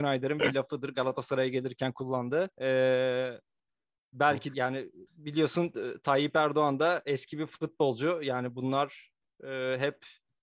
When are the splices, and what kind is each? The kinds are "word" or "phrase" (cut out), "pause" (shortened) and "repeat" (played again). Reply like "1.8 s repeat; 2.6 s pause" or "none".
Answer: 2.5 s pause; 4.5 s word; 5.1 s pause